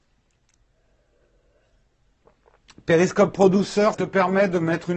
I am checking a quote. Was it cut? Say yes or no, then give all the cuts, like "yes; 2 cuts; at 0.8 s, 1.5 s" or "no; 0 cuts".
yes; 1 cut; at 3.9 s